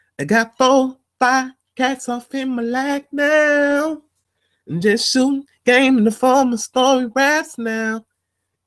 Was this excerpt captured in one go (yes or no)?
yes